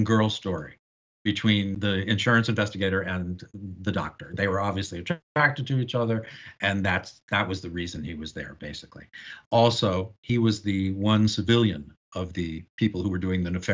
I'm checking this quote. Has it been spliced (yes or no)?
no